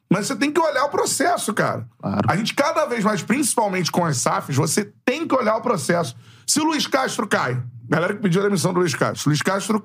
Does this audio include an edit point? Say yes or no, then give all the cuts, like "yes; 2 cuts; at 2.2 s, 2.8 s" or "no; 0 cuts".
no; 0 cuts